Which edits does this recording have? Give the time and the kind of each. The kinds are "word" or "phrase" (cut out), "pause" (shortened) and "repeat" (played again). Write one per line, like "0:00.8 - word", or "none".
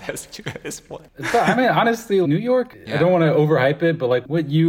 0:02.2 - word